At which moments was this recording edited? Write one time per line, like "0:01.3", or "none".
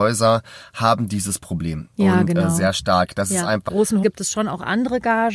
0:01.9
0:03.7
0:04.0